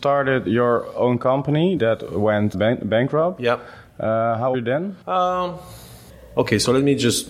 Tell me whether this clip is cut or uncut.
cut